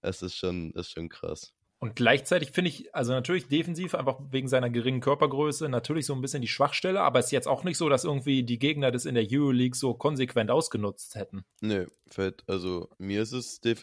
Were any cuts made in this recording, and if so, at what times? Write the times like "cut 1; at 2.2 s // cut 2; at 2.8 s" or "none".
cut 1; at 1.6 s // cut 2; at 11.5 s // cut 3; at 12.9 s